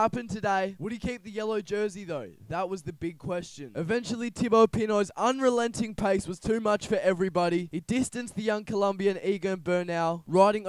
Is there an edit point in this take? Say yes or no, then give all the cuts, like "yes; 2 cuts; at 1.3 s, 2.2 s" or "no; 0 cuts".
no; 0 cuts